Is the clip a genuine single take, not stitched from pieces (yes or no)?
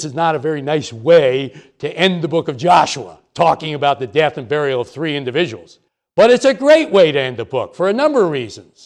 no